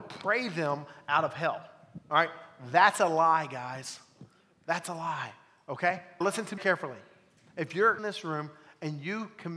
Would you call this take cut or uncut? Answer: cut